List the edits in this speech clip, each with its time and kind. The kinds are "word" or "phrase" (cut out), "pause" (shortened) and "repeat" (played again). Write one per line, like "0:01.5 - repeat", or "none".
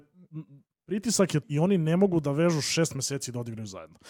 0:01.4 - word